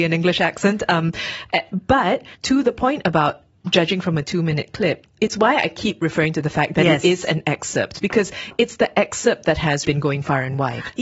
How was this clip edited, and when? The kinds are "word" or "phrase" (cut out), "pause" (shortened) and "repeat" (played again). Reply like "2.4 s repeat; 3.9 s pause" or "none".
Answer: 2.3 s pause; 5.2 s word; 9.8 s word